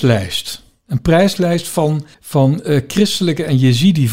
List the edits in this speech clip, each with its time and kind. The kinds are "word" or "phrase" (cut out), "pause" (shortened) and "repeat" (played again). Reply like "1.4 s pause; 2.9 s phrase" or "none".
2.1 s pause